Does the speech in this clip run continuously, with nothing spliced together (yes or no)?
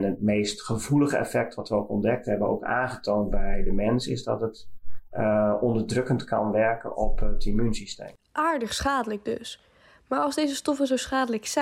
yes